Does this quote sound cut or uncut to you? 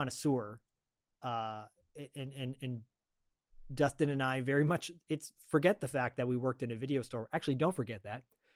uncut